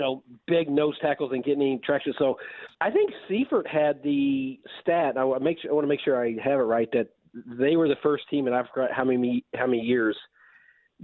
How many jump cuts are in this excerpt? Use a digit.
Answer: 1